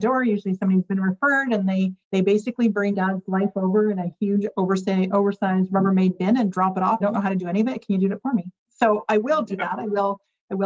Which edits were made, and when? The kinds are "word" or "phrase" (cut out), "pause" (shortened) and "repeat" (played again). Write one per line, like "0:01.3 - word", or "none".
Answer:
0:02.0 - pause
0:02.9 - phrase
0:07.0 - phrase
0:08.6 - pause